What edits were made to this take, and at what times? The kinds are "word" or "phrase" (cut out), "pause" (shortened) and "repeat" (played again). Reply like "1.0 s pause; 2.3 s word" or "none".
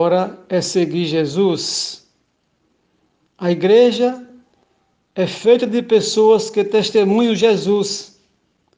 none